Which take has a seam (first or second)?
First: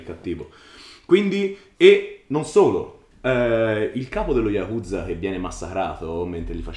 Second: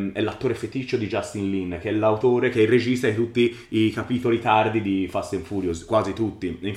first